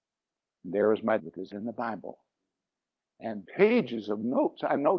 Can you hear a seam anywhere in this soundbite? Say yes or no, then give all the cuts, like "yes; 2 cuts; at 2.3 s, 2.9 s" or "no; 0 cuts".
yes; 3 cuts; at 1.2 s, 1.5 s, 3.4 s